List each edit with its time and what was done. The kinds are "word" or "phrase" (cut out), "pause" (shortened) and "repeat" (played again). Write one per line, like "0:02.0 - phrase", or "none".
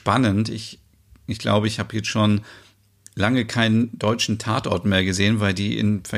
none